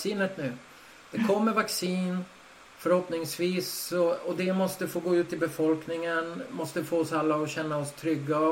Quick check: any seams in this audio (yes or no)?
no